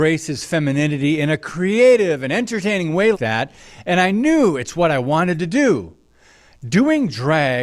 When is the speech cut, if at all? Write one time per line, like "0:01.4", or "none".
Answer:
0:03.1